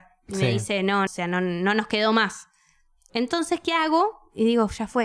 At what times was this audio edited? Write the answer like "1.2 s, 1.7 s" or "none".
1.1 s